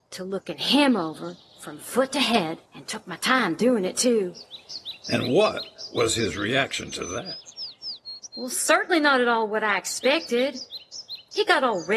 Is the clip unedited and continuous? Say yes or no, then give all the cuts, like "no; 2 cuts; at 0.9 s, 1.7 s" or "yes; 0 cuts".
no; 1 cut; at 2.7 s